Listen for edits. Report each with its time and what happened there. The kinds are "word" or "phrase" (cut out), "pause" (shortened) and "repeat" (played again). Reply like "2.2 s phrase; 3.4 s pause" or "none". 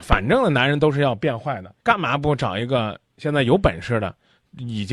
1.8 s pause; 3.1 s pause